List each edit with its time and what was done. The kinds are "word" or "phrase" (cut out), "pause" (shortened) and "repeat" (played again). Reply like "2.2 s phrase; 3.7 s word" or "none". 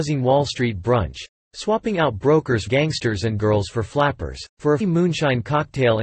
2.7 s word; 3.4 s word; 4.5 s pause; 4.8 s word